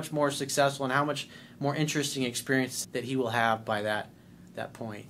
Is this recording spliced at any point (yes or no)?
yes